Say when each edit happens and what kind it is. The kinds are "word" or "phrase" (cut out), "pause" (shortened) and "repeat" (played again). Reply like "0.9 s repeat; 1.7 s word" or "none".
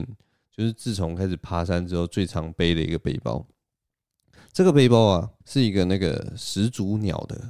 5.4 s pause